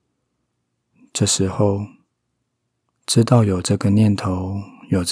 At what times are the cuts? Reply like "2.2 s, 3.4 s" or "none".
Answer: none